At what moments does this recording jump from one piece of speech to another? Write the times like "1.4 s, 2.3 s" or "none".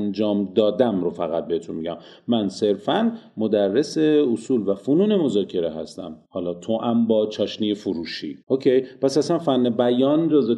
6.2 s, 8.4 s